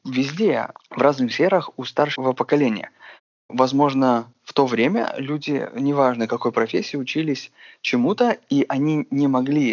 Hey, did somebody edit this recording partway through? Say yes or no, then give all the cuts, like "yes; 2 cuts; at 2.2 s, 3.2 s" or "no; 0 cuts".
no; 0 cuts